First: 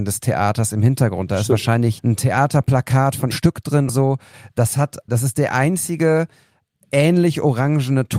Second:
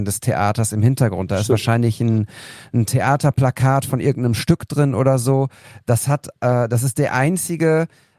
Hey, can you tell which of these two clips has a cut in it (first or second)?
first